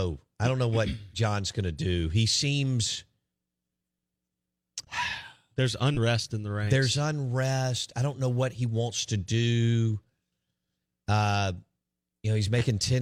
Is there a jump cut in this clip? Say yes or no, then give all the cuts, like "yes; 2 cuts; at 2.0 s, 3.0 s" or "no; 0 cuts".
no; 0 cuts